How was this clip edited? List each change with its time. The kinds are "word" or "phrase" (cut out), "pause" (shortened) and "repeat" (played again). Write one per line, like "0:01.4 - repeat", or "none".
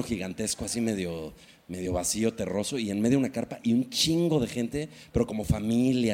none